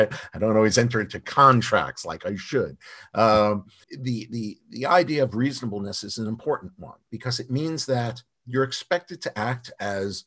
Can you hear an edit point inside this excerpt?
yes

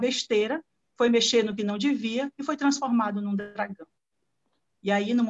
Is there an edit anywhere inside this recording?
no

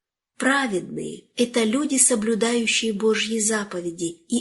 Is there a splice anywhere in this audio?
no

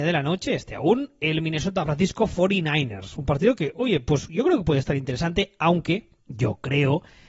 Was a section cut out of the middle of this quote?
yes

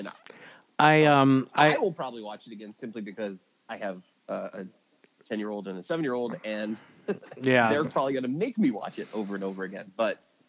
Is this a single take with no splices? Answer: no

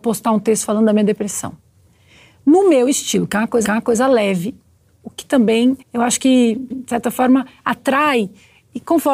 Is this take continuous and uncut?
no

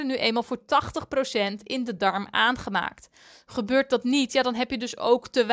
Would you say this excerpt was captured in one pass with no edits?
yes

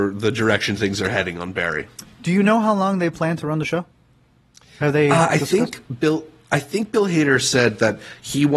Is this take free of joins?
yes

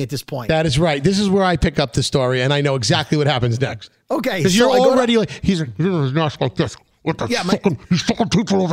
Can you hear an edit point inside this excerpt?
no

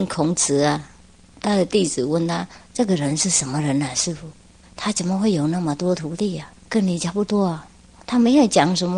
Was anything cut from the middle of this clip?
yes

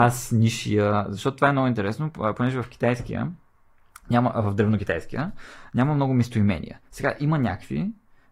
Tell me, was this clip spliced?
no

